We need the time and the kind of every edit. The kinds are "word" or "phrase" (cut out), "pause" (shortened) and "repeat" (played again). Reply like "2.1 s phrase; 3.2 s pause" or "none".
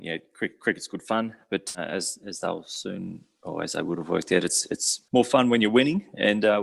1.7 s word; 5.1 s pause